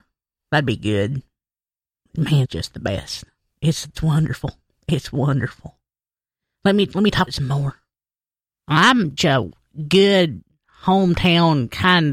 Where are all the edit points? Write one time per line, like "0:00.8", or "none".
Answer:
0:02.4
0:03.9
0:07.3
0:09.2